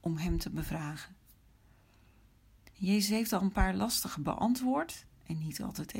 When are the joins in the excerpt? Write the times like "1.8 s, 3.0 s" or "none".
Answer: 2.7 s